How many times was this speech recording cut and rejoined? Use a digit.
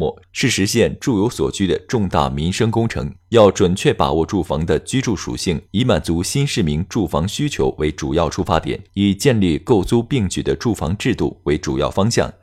3